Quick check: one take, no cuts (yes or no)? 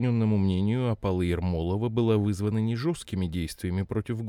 yes